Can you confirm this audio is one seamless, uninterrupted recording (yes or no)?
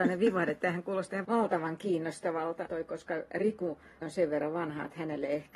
no